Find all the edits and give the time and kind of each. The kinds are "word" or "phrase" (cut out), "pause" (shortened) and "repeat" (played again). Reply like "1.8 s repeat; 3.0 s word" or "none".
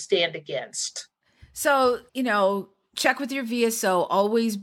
2.1 s pause